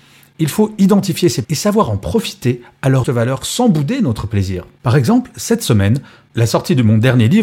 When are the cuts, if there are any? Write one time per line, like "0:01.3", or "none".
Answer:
0:01.4
0:03.0

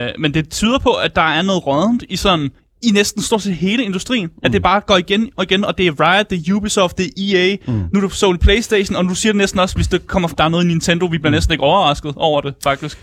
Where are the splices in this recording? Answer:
0:02.6
0:10.3

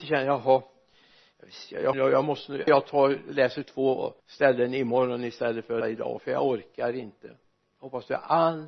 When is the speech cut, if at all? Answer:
0:01.9
0:02.7
0:04.2
0:05.8
0:07.6

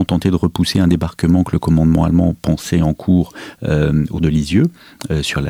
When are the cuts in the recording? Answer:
0:04.1

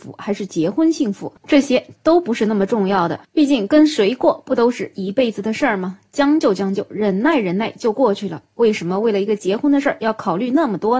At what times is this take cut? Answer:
none

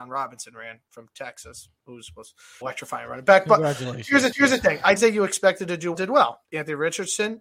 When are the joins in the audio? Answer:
0:01.8
0:02.6
0:04.3
0:05.0
0:05.9
0:06.4

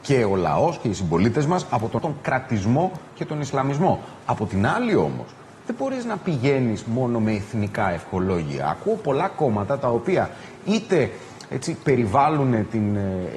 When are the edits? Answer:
0:02.0
0:03.1

